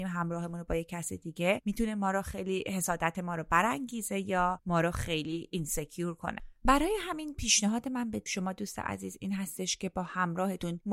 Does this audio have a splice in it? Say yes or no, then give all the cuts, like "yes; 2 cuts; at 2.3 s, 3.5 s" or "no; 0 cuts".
no; 0 cuts